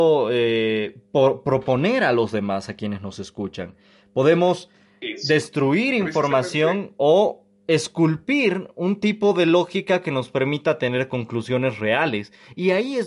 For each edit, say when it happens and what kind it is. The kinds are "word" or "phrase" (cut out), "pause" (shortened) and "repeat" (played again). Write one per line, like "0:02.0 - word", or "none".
none